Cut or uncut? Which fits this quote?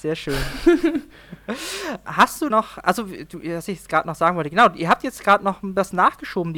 cut